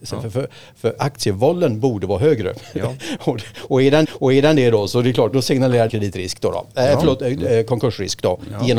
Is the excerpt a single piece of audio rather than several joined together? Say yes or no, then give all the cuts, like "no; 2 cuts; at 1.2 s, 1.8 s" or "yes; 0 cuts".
no; 3 cuts; at 4.0 s, 5.3 s, 5.9 s